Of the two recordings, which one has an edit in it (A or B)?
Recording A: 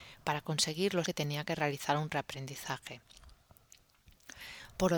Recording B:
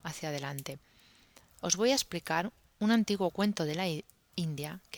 A